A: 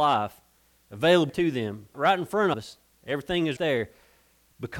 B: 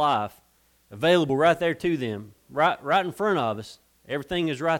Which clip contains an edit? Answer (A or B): A